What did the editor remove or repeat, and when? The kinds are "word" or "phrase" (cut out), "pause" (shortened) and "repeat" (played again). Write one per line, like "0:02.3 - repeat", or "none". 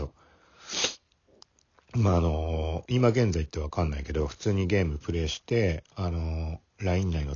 none